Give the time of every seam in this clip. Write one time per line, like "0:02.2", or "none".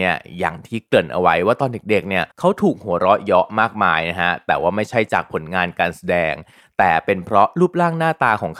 0:02.3